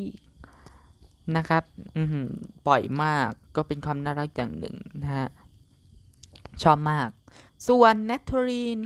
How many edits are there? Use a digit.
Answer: 2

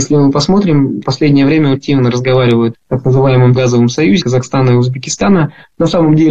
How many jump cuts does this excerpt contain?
5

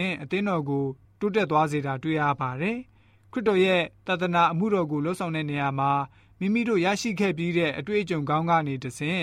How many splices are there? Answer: 0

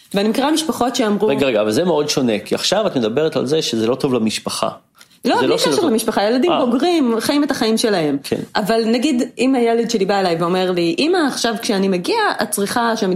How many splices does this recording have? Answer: 0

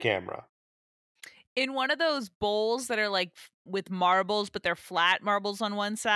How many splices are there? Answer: 0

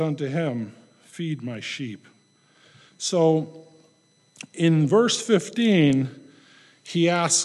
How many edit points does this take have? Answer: 0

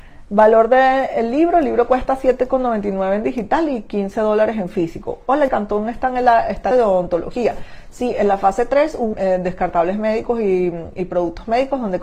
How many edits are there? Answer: 3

